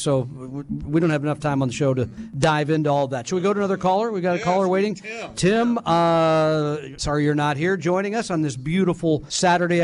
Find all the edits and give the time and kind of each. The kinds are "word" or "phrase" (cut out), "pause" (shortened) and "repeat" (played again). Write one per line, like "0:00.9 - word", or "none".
none